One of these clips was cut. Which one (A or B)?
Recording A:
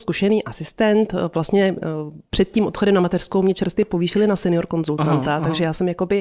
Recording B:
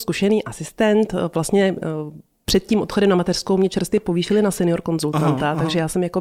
A